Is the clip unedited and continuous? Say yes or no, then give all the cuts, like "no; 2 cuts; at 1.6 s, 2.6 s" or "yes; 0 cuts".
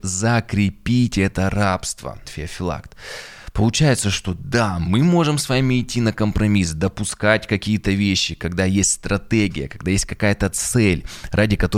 no; 1 cut; at 2.2 s